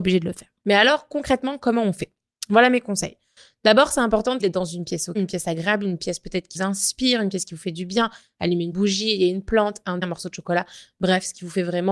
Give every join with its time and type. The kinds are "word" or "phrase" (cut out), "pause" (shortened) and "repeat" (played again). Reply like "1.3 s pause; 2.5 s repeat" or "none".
4.4 s word; 5.1 s word; 6.5 s word; 8.7 s word; 10.0 s word